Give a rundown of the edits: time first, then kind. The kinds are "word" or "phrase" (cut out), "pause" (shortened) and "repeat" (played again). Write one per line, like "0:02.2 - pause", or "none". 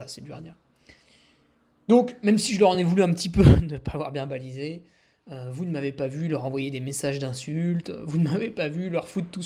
none

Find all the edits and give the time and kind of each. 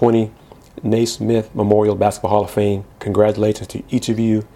0:02.9 - pause

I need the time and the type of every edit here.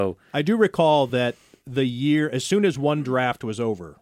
none

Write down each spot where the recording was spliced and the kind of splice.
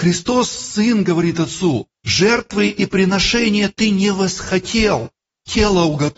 0:01.9 - pause

